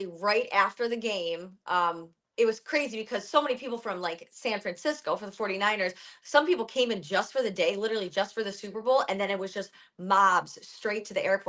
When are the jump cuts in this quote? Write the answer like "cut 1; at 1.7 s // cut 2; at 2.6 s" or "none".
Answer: none